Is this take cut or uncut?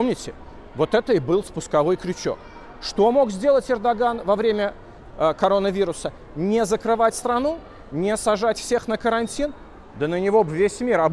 uncut